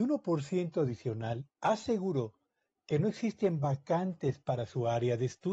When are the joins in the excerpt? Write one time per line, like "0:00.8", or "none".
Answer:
0:01.5